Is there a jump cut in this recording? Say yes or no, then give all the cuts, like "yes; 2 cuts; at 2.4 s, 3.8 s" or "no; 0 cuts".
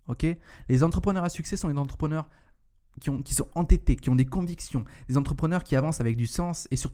no; 0 cuts